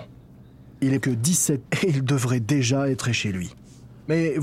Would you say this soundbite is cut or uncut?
cut